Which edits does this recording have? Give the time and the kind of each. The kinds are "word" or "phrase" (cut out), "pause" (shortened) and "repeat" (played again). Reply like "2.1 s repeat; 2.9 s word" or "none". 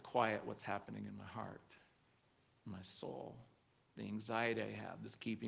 none